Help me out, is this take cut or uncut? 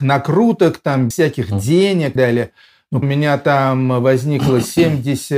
cut